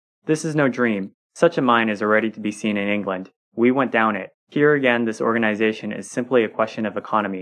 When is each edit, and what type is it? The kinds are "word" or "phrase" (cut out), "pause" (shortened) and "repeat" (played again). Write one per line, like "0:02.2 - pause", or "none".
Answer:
0:04.3 - pause

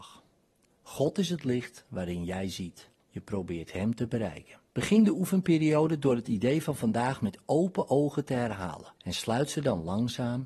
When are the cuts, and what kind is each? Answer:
0:03.0 - pause
0:04.7 - pause
0:09.0 - pause

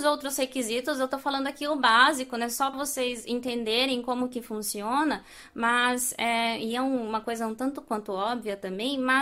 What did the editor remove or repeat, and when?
0:02.7 - word

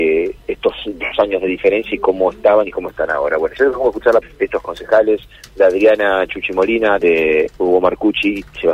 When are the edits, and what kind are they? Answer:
0:04.2 - word
0:07.0 - word

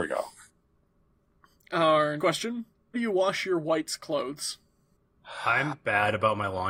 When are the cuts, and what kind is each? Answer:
0:02.2 - word
0:02.9 - word

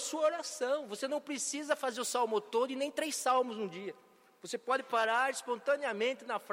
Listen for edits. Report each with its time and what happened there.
none

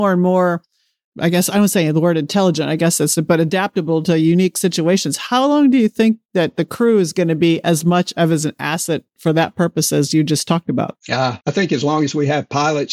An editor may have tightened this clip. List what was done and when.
0:11.0 - pause
0:11.4 - pause

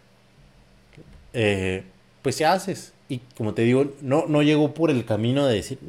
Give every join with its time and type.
0:02.0 - pause
0:02.4 - phrase
0:03.0 - pause

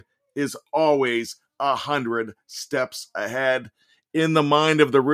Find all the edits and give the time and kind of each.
none

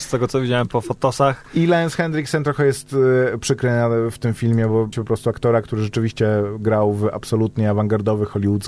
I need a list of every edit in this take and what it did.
0:04.9 - word

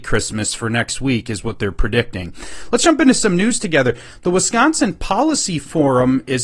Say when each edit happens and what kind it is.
none

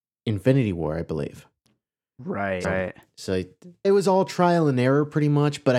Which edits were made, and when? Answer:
0:02.6 - word
0:03.8 - word

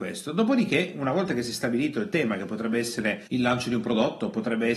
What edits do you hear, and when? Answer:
0:03.3 - pause

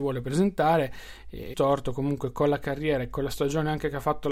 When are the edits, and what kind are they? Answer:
0:01.5 - word

